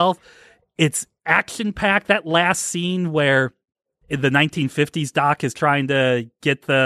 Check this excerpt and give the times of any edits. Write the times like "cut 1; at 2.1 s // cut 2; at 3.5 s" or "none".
none